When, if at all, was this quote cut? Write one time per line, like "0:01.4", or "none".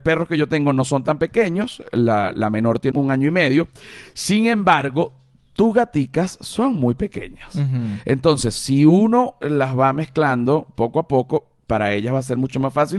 0:02.9